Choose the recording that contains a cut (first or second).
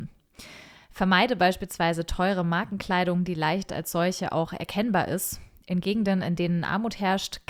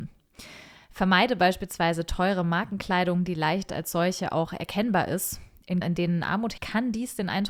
second